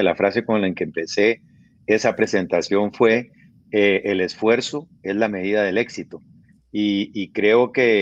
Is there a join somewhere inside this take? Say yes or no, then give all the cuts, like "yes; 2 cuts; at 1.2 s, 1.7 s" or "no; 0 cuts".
no; 0 cuts